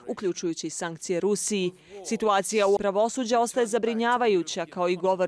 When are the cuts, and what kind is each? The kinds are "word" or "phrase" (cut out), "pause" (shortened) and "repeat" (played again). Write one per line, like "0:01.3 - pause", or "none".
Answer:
0:02.8 - word